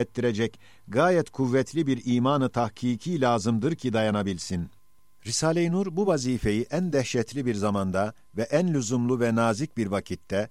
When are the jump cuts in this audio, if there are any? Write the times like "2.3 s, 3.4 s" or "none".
none